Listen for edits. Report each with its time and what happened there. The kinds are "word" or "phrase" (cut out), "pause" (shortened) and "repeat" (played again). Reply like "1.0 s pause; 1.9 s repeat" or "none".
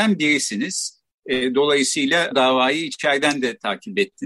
2.3 s word